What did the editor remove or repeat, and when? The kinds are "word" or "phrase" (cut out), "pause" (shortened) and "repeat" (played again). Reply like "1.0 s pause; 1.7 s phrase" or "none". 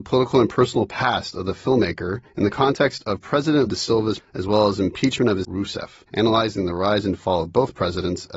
2.3 s pause; 3.7 s word; 4.2 s word; 5.4 s phrase; 6.1 s pause